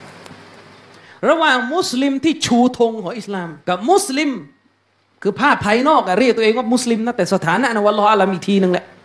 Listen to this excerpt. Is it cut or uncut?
cut